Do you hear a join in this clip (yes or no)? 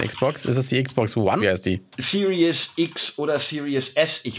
yes